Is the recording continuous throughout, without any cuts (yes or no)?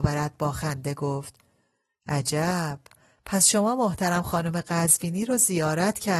yes